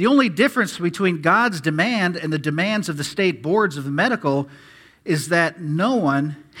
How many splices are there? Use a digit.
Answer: 0